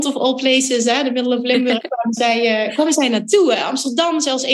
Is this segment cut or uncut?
uncut